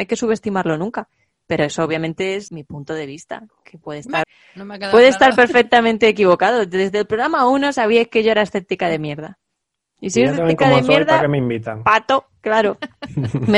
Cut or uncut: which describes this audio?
cut